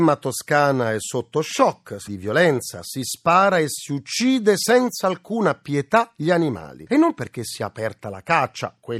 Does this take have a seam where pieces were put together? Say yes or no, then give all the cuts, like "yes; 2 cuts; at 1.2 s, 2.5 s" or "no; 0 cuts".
yes; 1 cut; at 2.1 s